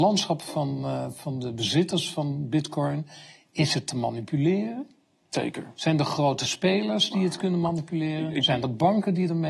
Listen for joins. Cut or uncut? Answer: uncut